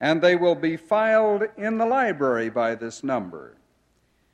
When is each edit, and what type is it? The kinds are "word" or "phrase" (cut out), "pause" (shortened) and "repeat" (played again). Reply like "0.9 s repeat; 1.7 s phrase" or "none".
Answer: none

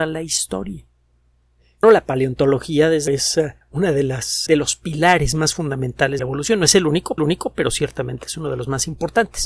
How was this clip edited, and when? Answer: 1.8 s word; 3.1 s word; 3.6 s pause; 4.5 s word; 6.2 s phrase; 7.2 s repeat

